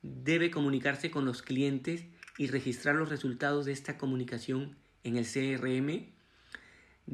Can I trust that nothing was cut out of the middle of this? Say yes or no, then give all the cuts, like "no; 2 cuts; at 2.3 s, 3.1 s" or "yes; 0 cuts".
yes; 0 cuts